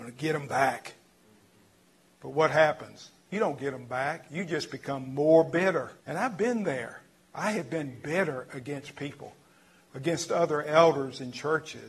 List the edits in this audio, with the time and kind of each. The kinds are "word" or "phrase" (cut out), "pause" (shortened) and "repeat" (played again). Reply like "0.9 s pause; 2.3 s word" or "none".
6.0 s pause